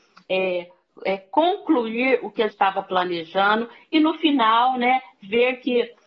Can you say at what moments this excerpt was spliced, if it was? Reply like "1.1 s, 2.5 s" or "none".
1.0 s, 2.5 s